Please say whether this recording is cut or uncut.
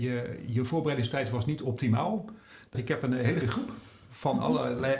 cut